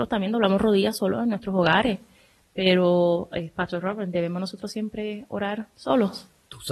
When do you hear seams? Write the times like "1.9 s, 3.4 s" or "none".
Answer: none